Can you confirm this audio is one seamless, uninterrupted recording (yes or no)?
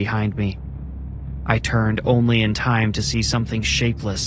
yes